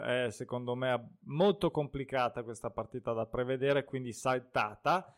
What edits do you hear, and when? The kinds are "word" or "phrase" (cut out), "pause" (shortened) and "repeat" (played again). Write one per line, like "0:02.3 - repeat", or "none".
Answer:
none